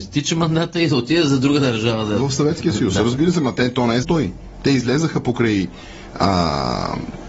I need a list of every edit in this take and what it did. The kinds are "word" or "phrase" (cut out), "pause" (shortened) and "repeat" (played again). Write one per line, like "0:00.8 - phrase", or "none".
0:04.0 - word

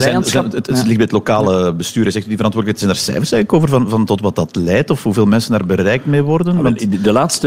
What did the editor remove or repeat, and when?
none

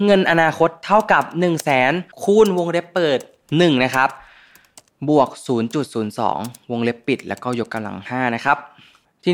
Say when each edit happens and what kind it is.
0:02.1 - pause

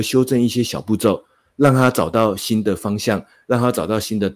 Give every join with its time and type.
none

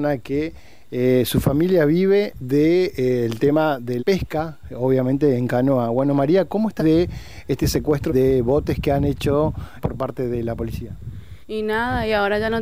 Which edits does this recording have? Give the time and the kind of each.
0:04.0 - word
0:06.8 - phrase
0:08.1 - word
0:09.8 - word
0:11.4 - pause

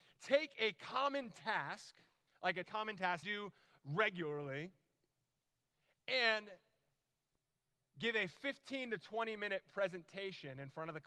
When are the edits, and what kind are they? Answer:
0:02.3 - pause
0:02.6 - word
0:03.2 - phrase

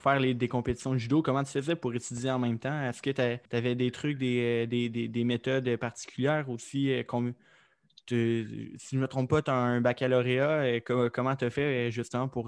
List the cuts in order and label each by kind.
0:03.5 - pause

